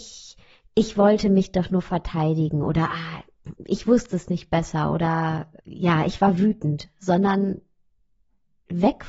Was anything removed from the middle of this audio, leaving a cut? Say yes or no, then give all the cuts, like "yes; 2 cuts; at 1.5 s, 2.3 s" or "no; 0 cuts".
yes; 2 cuts; at 3.6 s, 5.6 s